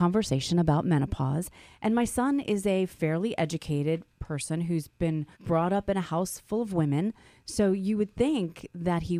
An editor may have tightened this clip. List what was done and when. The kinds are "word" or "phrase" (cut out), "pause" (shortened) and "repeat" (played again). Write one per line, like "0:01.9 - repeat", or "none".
0:05.3 - pause